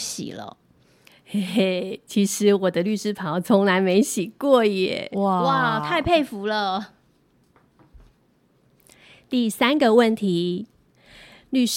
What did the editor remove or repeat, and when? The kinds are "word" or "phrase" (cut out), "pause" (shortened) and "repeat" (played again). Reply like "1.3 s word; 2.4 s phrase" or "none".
none